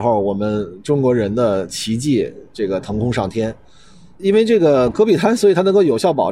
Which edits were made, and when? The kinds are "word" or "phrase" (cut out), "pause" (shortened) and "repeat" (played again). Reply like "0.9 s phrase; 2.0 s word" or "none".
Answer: none